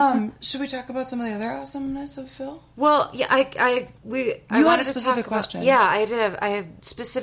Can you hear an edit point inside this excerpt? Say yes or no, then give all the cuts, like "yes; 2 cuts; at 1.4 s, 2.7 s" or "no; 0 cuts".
yes; 1 cut; at 4.0 s